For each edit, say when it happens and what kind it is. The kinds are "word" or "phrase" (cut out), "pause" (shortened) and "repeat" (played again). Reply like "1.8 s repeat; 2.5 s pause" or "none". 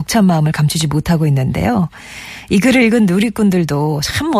none